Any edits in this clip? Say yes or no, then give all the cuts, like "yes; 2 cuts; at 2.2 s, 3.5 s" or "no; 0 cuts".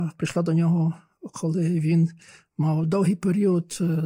no; 0 cuts